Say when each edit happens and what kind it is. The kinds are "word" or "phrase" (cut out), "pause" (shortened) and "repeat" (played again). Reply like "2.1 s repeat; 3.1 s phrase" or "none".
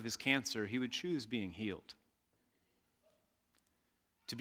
none

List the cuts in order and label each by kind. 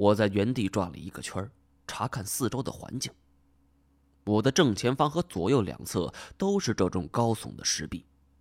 none

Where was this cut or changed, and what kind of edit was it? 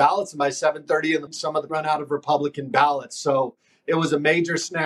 1.3 s word; 1.7 s phrase

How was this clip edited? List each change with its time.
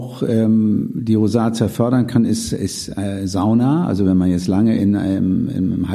none

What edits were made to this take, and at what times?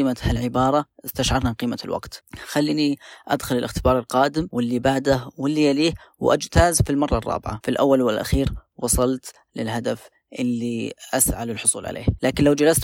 none

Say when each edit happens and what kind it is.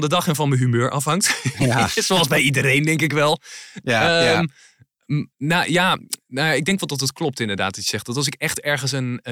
5.3 s pause

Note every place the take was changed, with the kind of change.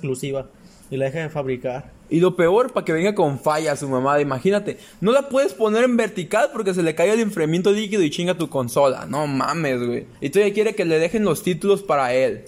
2.0 s pause; 10.1 s pause

